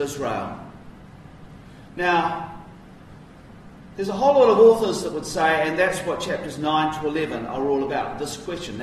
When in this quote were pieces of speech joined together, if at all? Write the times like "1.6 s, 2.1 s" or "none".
none